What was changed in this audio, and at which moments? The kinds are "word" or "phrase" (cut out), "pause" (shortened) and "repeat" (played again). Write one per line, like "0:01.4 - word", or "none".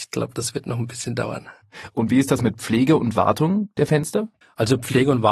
0:04.4 - pause